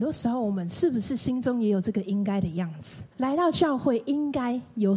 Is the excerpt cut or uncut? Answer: cut